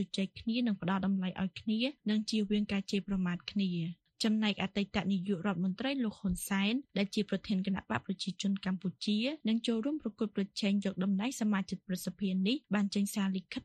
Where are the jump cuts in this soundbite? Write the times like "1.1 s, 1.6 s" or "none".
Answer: none